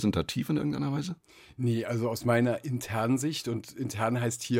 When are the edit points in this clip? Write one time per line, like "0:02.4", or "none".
none

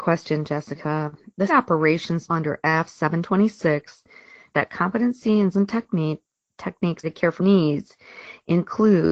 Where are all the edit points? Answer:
0:01.5
0:02.3
0:04.5
0:05.5
0:07.0
0:07.4

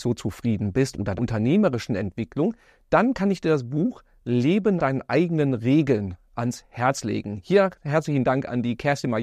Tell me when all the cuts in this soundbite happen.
0:01.2
0:04.8

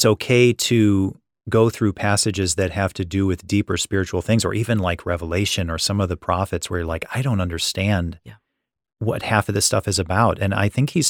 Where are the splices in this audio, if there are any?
none

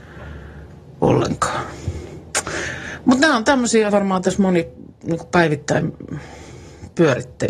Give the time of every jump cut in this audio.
0:03.9

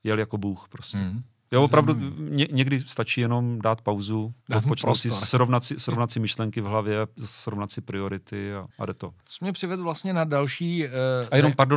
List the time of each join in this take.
0:04.4
0:08.7
0:09.2

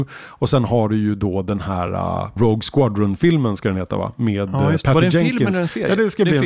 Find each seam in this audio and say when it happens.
none

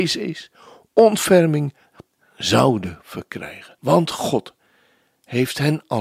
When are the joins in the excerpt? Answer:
0:02.1
0:03.8

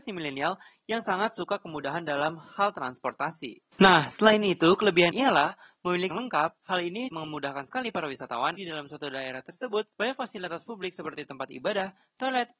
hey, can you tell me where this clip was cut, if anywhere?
0:03.7
0:05.1
0:06.1
0:06.6
0:07.1
0:08.6
0:09.9

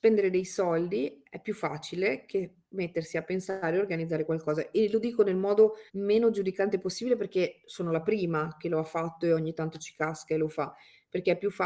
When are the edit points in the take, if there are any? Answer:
0:05.9

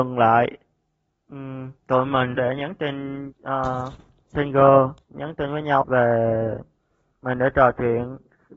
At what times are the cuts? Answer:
0:01.8
0:02.4
0:03.3
0:05.0
0:05.8

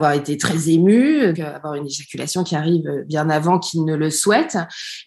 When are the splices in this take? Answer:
0:01.3

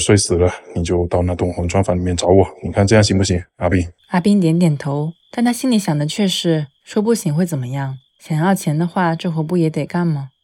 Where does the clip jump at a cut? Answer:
0:04.0
0:05.2
0:06.8
0:08.1

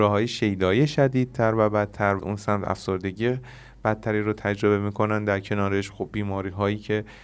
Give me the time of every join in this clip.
0:02.2

